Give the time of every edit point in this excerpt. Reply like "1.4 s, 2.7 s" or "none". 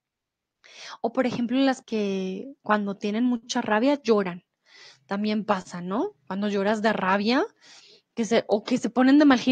1.8 s